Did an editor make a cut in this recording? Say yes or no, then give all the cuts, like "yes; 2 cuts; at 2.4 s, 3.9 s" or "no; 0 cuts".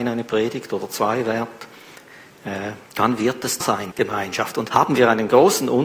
yes; 4 cuts; at 2.9 s, 3.6 s, 3.9 s, 4.7 s